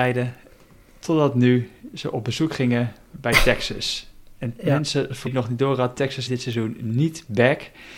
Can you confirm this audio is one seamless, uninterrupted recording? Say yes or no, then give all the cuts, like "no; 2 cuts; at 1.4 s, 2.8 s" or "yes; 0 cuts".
no; 2 cuts; at 5.3 s, 6.3 s